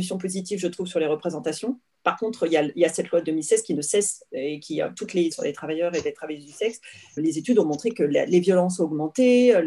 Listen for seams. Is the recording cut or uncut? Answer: cut